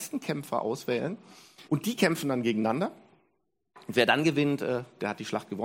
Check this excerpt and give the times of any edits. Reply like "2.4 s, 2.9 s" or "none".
1.6 s